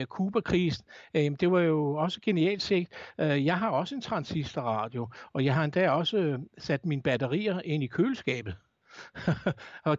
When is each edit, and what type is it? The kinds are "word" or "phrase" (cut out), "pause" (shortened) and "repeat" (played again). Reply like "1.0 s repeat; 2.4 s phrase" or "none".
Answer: none